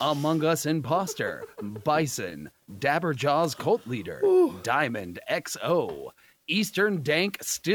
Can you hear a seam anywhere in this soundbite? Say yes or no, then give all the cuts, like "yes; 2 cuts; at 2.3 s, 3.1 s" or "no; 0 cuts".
no; 0 cuts